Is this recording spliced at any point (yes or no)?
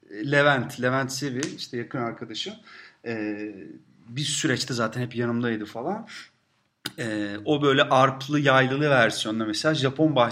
no